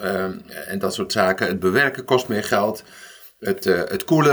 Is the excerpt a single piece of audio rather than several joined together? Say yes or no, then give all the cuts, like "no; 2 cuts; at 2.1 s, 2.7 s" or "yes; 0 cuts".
yes; 0 cuts